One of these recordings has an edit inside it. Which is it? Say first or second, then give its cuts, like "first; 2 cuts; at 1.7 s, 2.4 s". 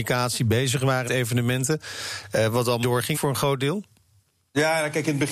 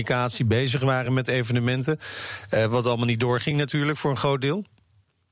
first; 3 cuts; at 1.1 s, 2.8 s, 3.1 s